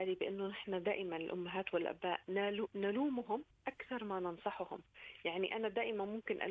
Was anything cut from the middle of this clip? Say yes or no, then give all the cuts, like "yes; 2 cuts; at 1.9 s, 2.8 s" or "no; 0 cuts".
no; 0 cuts